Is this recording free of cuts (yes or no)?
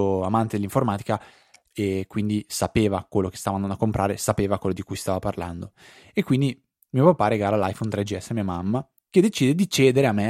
yes